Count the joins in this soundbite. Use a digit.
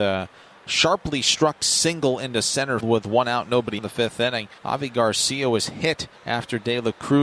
4